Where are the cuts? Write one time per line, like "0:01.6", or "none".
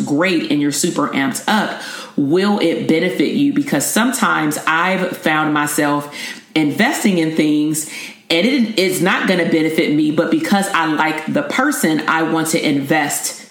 none